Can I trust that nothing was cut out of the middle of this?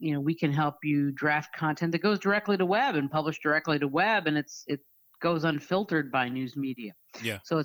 yes; 0 cuts

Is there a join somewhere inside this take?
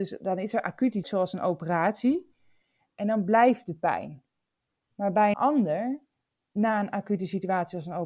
yes; 2 cuts; at 1.0 s, 5.3 s

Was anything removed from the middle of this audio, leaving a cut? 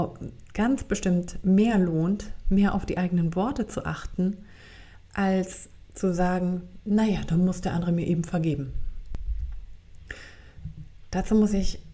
no; 0 cuts

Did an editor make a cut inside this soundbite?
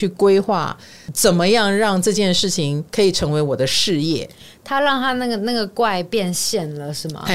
yes; 1 cut; at 2.9 s

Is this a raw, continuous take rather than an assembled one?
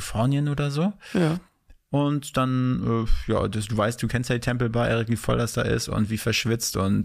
yes; 0 cuts

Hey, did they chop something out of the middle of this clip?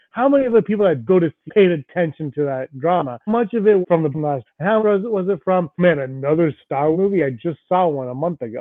yes; 9 cuts; at 1.1 s, 1.5 s, 3.3 s, 3.8 s, 4.1 s, 4.5 s, 4.8 s, 5.8 s, 6.9 s

